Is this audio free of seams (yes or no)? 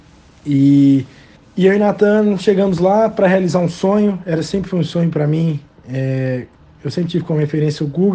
no